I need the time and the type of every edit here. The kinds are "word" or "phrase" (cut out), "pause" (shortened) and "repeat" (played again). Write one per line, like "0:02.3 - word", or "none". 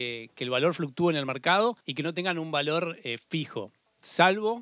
0:01.8 - pause